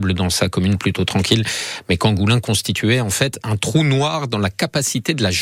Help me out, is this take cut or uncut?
uncut